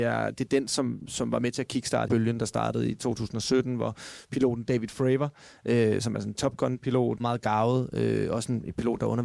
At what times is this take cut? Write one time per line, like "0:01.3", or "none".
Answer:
0:01.0
0:02.1
0:07.2